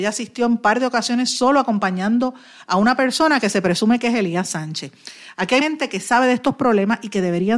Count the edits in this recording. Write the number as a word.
one